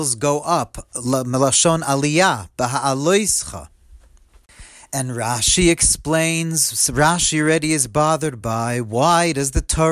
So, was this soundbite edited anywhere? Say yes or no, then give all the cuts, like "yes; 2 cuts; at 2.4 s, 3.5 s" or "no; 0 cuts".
no; 0 cuts